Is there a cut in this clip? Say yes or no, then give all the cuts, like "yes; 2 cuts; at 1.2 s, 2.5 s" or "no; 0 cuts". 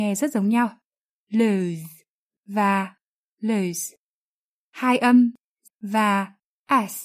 yes; 1 cut; at 5.7 s